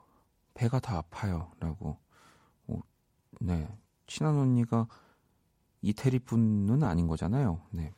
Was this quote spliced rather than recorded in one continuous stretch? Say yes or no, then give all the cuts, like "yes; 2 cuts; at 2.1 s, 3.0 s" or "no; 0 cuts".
no; 0 cuts